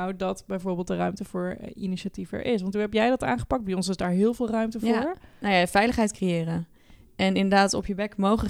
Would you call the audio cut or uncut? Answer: uncut